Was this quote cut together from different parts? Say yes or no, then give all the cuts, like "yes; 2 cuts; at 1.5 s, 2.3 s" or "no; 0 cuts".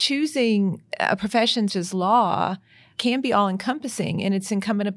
yes; 1 cut; at 1.7 s